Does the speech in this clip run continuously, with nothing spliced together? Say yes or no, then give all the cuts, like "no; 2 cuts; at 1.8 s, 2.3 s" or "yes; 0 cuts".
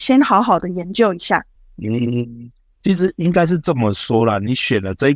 no; 1 cut; at 1.6 s